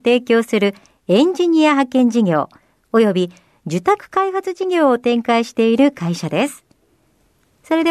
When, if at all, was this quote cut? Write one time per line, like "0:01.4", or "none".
none